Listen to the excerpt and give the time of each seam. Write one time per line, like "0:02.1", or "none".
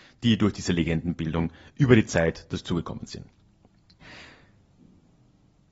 none